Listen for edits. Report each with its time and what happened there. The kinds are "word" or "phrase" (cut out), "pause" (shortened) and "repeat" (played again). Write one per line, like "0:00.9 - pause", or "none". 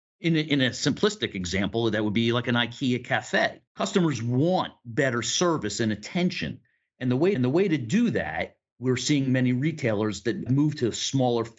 0:03.7 - pause
0:07.3 - repeat
0:10.5 - word